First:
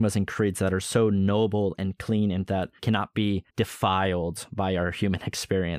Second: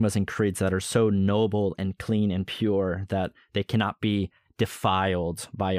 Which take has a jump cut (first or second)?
first